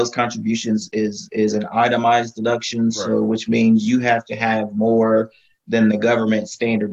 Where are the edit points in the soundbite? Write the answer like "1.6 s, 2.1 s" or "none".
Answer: none